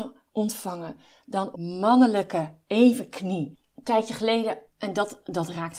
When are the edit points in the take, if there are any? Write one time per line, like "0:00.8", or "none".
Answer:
0:01.5
0:04.7